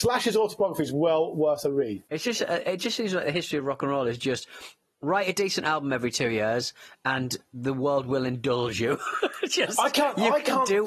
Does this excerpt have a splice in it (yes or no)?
yes